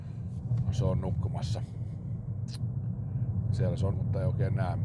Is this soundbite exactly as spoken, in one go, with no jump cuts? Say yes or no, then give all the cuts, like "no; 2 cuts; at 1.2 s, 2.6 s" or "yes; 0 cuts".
no; 1 cut; at 3.9 s